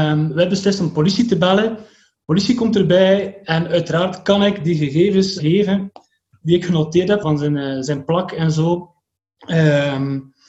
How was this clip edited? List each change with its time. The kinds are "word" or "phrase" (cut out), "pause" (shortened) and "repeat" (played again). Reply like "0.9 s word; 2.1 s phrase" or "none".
5.4 s word; 7.2 s word

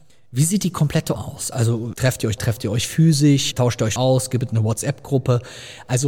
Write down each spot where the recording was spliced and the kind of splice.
1.1 s word; 1.9 s word; 2.4 s word; 3.5 s word; 4.0 s word

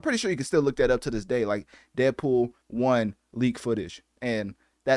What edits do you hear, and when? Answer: 2.6 s pause

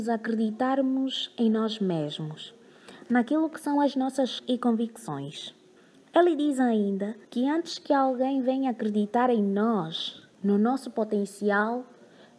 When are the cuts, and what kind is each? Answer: 4.4 s word; 5.8 s pause; 7.2 s pause; 10.3 s pause

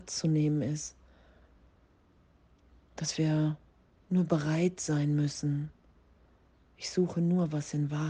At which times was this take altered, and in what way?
none

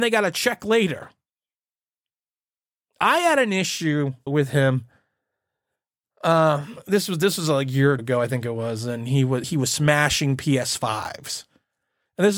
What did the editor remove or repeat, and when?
4.3 s word; 8.0 s word; 9.4 s word

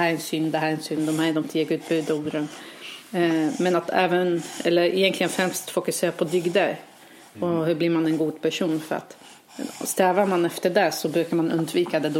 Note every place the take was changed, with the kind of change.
none

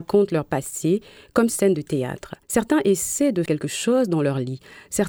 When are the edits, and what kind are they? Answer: 1.5 s phrase; 2.4 s pause; 3.5 s word

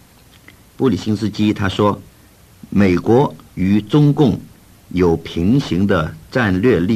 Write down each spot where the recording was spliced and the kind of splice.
2.1 s pause; 3.5 s pause

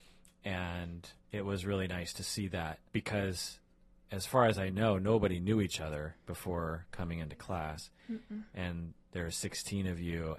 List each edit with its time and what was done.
1.2 s pause; 2.9 s pause; 6.2 s pause; 8.0 s pause

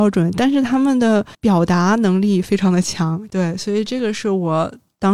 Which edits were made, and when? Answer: 1.3 s pause

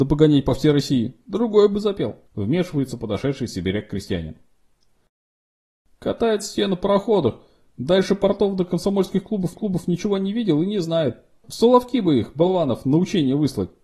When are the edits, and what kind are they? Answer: 2.3 s pause; 9.5 s repeat

